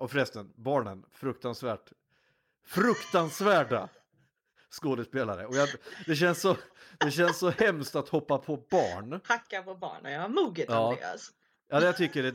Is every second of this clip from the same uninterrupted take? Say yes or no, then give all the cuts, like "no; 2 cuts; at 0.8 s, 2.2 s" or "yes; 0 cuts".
yes; 0 cuts